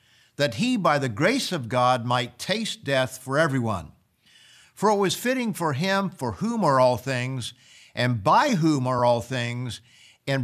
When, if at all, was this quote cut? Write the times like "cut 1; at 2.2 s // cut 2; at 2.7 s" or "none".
none